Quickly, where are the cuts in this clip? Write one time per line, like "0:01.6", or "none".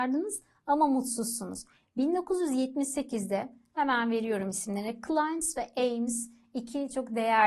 none